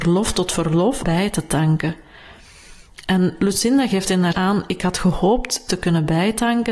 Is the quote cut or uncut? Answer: cut